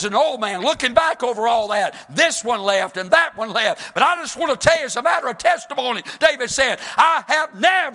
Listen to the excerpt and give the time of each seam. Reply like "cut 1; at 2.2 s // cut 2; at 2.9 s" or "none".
none